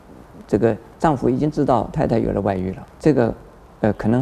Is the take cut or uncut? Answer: cut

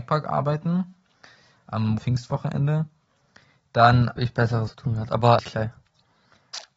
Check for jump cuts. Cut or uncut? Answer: cut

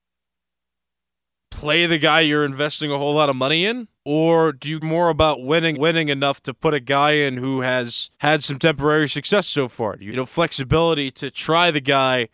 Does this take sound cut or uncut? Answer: cut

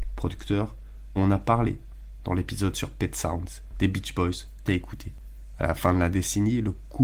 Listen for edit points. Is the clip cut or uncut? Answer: cut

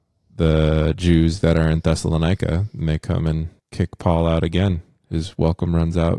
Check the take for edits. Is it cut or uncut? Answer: cut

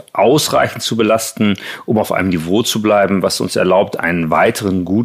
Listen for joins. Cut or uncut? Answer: uncut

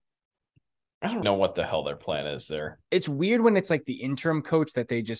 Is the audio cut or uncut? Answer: cut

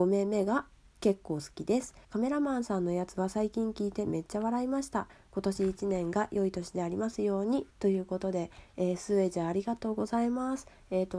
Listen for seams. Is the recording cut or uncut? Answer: cut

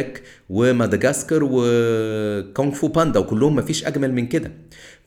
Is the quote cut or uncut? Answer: uncut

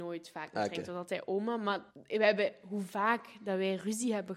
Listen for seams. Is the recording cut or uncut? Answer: cut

